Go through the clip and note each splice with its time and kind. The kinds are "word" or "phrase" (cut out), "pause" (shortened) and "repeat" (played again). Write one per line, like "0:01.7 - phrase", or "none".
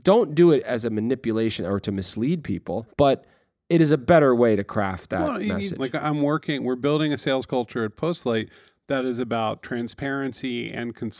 none